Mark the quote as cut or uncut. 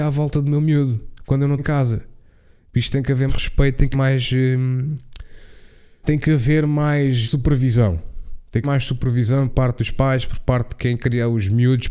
cut